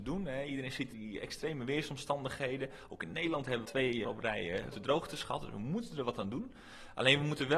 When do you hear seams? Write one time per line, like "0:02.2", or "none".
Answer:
0:00.9
0:03.7
0:04.0
0:04.7